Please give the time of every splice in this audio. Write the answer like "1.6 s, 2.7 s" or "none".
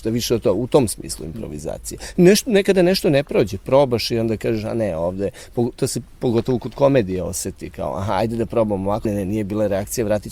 9.0 s